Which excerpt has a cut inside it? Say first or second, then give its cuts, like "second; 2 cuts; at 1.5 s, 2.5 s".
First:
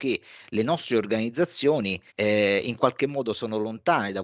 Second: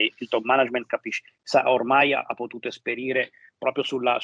first; 1 cut; at 2.1 s